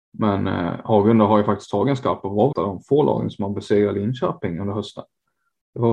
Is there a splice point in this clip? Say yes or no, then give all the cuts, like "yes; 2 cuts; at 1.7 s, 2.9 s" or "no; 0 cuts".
yes; 1 cut; at 2.5 s